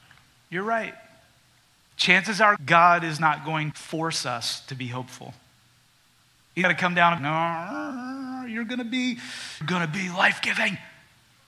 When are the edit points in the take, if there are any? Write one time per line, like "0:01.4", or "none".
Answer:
0:02.6
0:03.7
0:06.6
0:07.2
0:09.6